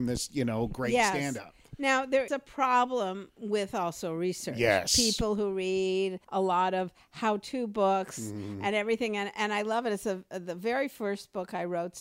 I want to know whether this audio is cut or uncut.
cut